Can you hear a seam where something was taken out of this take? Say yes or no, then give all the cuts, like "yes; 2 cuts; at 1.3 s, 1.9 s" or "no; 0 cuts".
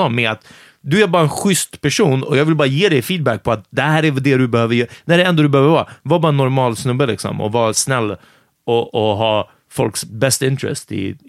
no; 0 cuts